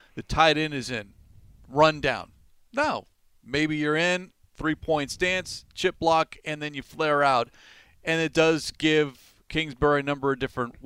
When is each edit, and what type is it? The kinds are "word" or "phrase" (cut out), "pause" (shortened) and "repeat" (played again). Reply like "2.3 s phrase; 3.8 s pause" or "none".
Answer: none